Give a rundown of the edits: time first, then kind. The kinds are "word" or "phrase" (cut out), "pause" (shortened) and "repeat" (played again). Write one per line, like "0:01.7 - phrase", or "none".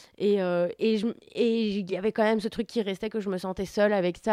none